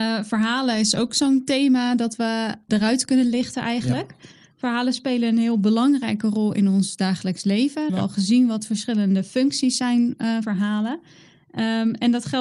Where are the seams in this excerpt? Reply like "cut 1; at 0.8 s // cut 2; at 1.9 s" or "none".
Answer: cut 1; at 2.7 s // cut 2; at 7.9 s // cut 3; at 10.4 s